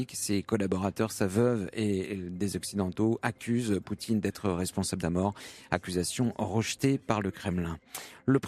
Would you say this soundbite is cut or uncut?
cut